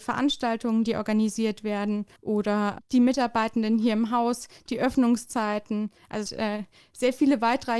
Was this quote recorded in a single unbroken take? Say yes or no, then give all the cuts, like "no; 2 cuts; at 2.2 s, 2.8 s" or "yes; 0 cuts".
no; 2 cuts; at 2.2 s, 6.3 s